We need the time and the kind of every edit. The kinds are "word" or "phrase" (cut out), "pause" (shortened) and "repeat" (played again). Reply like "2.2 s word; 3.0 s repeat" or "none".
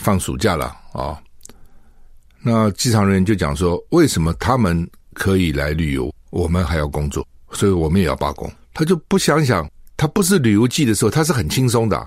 none